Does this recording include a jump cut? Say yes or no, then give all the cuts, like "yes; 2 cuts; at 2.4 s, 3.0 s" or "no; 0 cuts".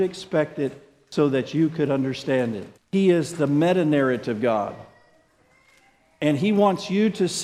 yes; 1 cut; at 2.8 s